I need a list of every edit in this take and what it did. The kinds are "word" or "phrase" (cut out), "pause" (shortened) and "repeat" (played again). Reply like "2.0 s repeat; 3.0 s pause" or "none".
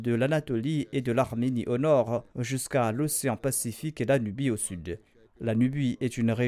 2.3 s pause; 5.2 s pause